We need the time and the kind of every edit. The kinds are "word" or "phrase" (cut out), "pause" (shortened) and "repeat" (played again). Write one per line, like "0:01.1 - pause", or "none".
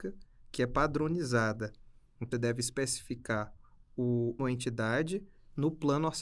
0:02.3 - word
0:04.4 - word